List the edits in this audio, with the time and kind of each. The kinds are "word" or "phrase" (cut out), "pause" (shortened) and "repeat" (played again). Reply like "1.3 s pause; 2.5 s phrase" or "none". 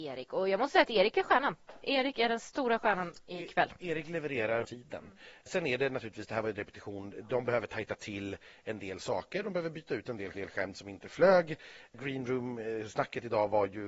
4.6 s phrase; 10.3 s repeat